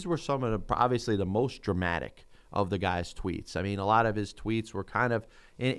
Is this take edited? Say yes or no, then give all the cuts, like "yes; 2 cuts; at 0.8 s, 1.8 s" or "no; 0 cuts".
no; 0 cuts